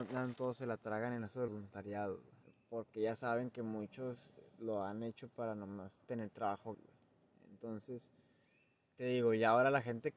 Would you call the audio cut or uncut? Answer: cut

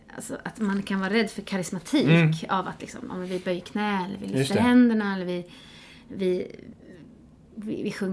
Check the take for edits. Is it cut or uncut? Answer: uncut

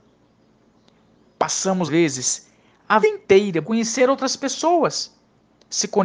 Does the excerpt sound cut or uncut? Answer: cut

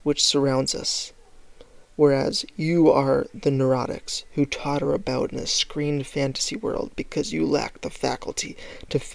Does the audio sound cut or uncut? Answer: uncut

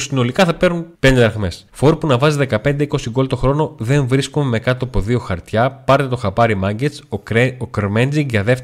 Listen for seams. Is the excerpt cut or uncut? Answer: cut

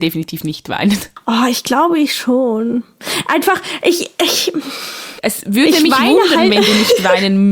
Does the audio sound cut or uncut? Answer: uncut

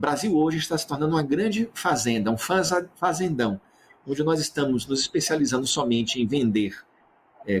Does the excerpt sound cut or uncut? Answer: uncut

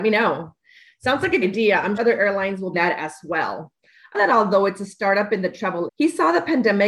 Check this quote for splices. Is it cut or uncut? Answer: cut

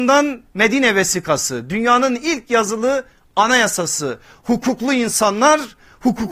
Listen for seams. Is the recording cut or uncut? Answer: uncut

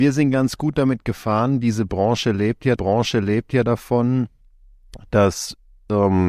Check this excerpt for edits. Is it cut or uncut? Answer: cut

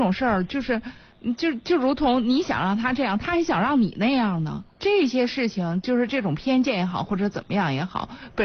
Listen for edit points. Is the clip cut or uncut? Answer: cut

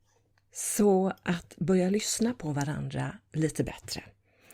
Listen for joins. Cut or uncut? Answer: uncut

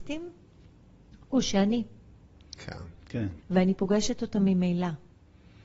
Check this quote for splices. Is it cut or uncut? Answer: cut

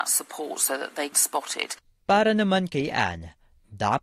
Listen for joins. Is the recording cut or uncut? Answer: cut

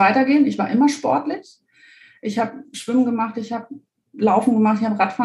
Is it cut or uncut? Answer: uncut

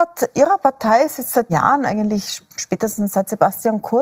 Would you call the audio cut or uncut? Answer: cut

